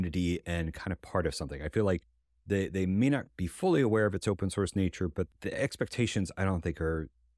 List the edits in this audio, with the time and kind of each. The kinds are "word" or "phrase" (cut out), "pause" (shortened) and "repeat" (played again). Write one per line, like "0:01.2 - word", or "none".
none